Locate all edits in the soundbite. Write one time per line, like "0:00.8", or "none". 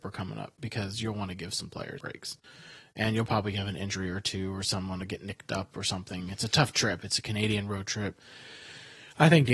0:02.0

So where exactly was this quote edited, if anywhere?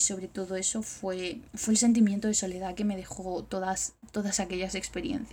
0:01.5

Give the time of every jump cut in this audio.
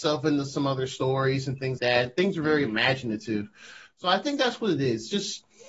0:01.8

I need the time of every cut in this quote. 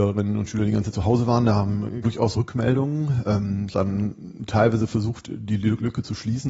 0:00.9
0:02.0
0:02.3
0:03.7

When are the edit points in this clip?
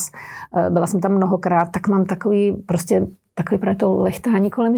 0:01.7

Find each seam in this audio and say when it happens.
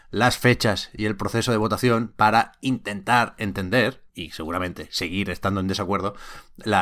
0:04.1

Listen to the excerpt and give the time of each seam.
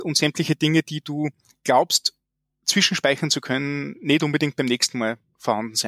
none

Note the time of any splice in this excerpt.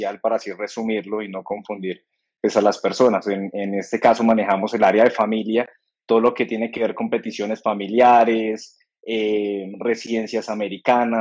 none

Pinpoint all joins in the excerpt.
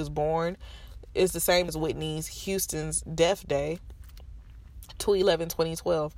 0:01.7

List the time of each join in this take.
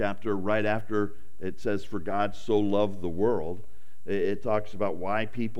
none

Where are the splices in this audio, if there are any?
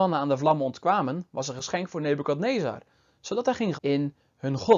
0:03.7

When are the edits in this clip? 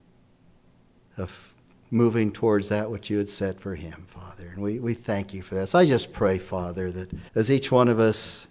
0:07.3

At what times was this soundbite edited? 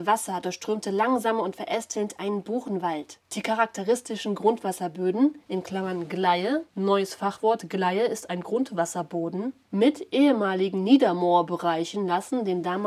0:05.4

